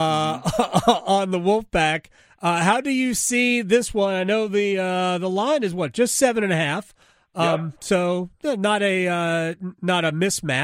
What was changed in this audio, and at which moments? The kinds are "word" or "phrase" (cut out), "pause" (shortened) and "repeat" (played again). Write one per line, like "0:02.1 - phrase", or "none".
none